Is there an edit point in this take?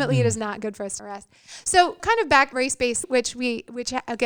yes; 4 cuts; at 1.0 s, 2.0 s, 2.5 s, 3.0 s

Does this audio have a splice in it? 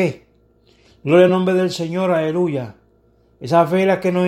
no; 0 cuts

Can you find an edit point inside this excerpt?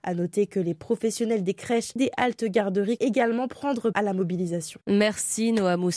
yes; 3 cuts; at 2.0 s, 3.0 s, 3.9 s

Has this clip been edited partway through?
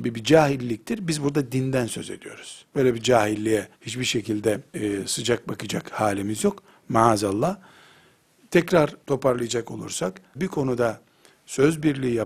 yes; 5 cuts; at 2.7 s, 3.7 s, 4.7 s, 9.0 s, 10.3 s

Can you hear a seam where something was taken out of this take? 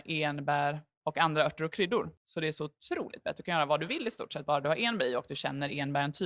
no; 0 cuts

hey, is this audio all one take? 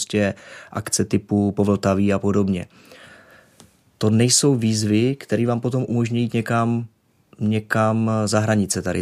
yes; 0 cuts

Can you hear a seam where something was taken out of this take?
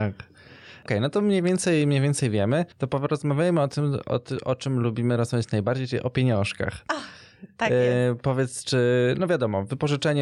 yes; 1 cut; at 2.7 s

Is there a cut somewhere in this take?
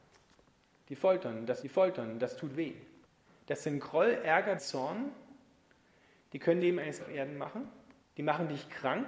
yes; 6 cuts; at 1.6 s, 3.0 s, 4.6 s, 6.6 s, 7.0 s, 8.0 s

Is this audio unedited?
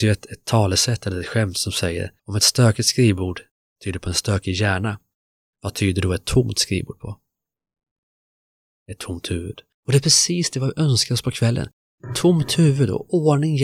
no; 1 cut; at 2.2 s

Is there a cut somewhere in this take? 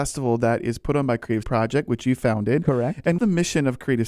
yes; 2 cuts; at 1.4 s, 3.2 s

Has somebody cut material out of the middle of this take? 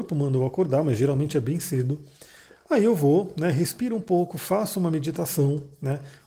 no; 0 cuts

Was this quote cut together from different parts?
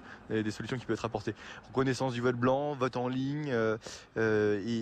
no; 0 cuts

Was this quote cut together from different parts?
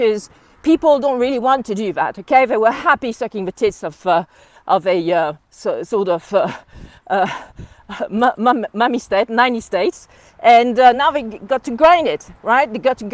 no; 0 cuts

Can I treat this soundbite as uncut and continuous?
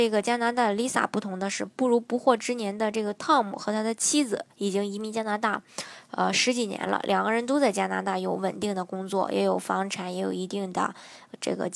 yes; 0 cuts

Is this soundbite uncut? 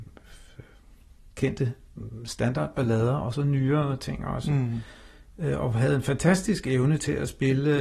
yes; 0 cuts

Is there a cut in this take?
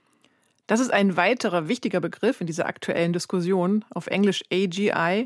no; 0 cuts

